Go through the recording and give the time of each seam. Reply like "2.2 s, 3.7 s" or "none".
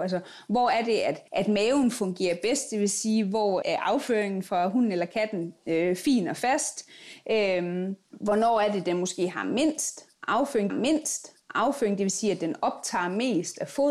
1.3 s, 3.6 s, 8.0 s, 10.7 s

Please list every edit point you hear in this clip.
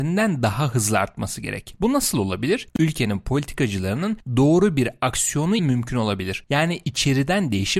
5.6 s

